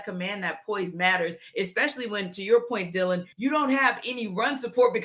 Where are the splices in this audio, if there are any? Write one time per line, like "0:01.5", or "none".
0:03.3